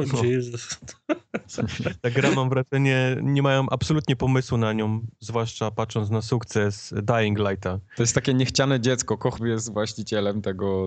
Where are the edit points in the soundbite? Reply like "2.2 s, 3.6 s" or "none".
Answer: 9.4 s